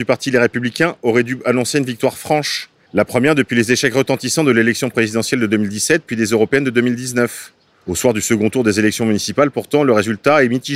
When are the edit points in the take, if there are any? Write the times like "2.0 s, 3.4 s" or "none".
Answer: none